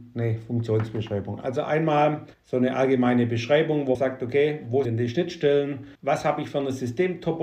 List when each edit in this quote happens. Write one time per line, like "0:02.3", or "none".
0:02.3
0:03.9
0:04.8
0:05.9